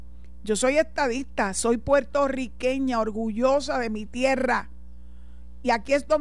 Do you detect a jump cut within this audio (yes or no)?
no